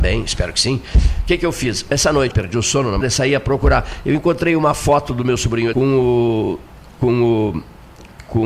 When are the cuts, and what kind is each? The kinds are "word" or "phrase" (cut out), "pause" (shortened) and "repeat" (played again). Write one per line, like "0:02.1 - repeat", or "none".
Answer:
0:02.3 - word
0:03.0 - word
0:05.7 - word

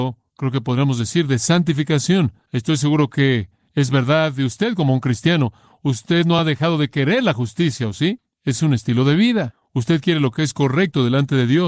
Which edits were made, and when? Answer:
none

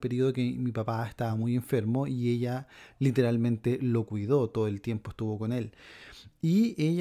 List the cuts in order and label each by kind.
none

